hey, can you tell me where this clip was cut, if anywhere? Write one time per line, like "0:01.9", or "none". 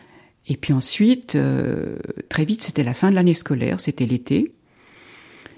none